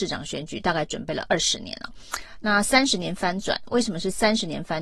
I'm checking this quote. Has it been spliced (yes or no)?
no